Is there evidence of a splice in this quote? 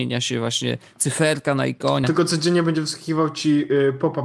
yes; 1 cut; at 2.0 s

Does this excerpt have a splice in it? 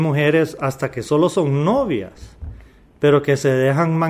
no; 0 cuts

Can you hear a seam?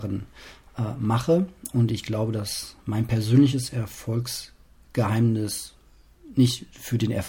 no; 0 cuts

